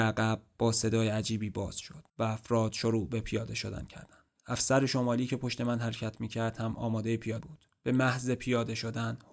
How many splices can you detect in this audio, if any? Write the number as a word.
two